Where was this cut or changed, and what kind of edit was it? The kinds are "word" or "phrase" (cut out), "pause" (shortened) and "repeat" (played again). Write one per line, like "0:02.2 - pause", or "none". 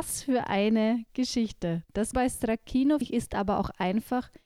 0:02.1 - word
0:03.0 - word

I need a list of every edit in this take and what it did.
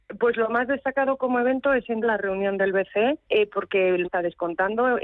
0:02.0 - word
0:03.2 - pause
0:04.0 - word

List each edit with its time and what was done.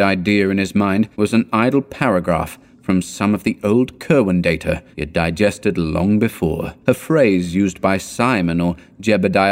0:01.1 - pause
0:04.9 - pause
0:06.8 - pause

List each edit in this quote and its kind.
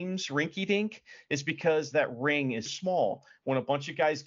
0:02.7 - word

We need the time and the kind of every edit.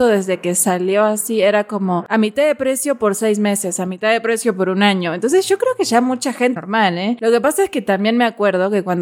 0:06.6 - phrase

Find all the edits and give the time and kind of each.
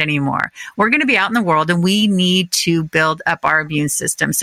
none

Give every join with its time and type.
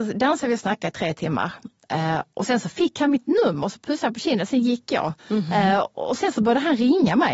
0:05.2 - pause

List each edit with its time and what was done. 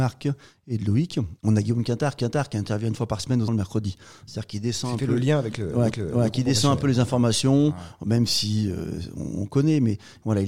0:01.4 - pause
0:02.2 - repeat
0:03.5 - word
0:05.9 - repeat

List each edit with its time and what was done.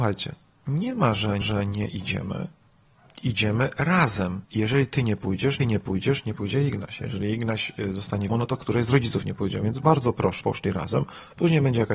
0:01.4 - repeat
0:04.4 - pause
0:05.6 - repeat
0:08.3 - word
0:10.4 - word

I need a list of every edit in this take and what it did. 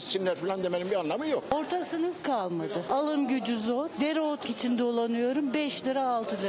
0:04.4 - word

